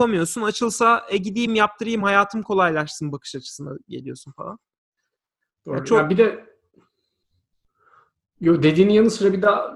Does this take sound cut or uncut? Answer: uncut